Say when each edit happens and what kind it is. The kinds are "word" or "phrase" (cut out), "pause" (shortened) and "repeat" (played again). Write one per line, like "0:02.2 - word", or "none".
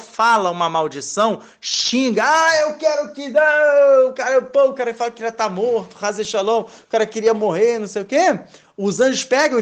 none